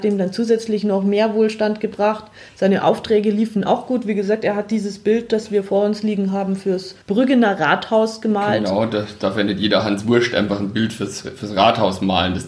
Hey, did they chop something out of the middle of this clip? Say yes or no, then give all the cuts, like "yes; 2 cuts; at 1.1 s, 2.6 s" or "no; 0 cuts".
yes; 1 cut; at 7.0 s